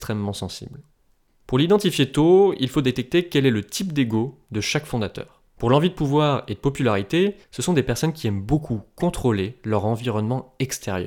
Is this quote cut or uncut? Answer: cut